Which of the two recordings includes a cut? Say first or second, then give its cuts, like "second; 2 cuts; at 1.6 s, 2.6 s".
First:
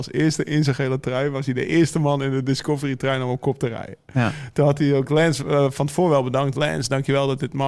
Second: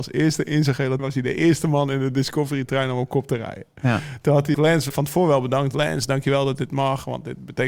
second; 3 cuts; at 1.0 s, 4.5 s, 4.9 s